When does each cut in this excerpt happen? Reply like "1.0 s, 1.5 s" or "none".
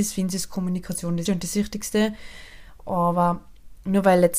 1.3 s